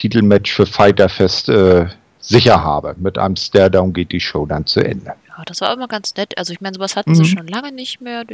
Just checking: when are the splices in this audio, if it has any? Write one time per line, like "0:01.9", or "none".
0:05.2